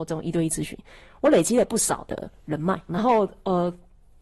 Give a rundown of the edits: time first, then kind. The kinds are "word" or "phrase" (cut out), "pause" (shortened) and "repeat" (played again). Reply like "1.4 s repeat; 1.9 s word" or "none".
2.9 s phrase